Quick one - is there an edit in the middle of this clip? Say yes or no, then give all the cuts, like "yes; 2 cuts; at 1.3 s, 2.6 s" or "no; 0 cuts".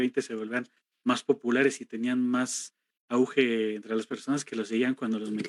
no; 0 cuts